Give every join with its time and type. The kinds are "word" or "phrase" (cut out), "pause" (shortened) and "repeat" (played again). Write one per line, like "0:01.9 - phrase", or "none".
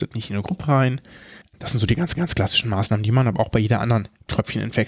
0:01.4 - pause
0:02.1 - repeat